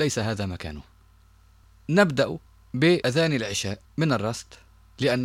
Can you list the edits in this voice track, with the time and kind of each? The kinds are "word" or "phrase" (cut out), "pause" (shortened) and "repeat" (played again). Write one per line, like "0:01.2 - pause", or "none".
0:03.8 - pause